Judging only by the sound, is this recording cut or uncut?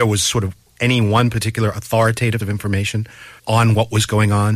cut